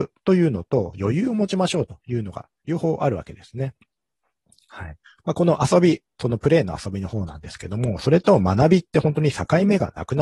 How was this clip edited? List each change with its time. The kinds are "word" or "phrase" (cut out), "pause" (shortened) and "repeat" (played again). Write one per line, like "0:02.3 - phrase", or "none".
0:05.1 - pause